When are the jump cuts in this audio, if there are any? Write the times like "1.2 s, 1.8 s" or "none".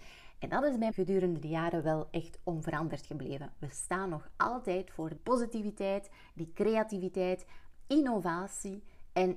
0.9 s, 5.2 s